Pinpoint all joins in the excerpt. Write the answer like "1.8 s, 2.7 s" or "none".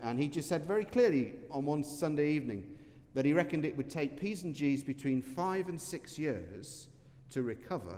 none